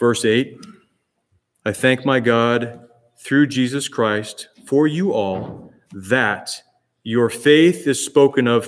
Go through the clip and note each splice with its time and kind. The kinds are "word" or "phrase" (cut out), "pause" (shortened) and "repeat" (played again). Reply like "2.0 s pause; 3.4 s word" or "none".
none